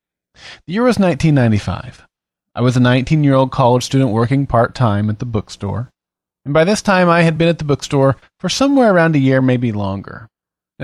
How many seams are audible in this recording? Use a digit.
0